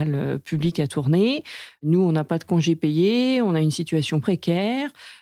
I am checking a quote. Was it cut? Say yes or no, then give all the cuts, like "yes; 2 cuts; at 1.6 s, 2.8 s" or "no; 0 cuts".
yes; 1 cut; at 4.2 s